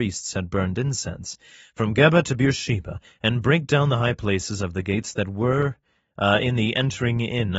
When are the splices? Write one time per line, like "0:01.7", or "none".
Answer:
none

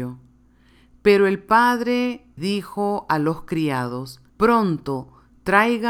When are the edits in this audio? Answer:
0:02.4
0:04.3

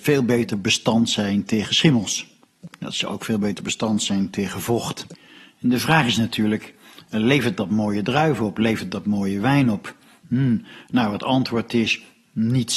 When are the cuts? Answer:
none

